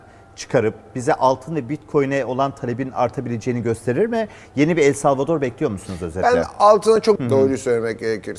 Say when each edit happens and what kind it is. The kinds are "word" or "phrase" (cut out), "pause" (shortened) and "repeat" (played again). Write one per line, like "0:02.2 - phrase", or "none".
0:07.2 - word